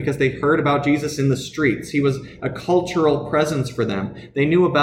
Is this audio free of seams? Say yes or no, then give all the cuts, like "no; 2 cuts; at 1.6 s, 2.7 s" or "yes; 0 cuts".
yes; 0 cuts